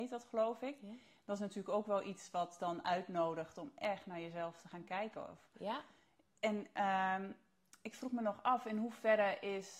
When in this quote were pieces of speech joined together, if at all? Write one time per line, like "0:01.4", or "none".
none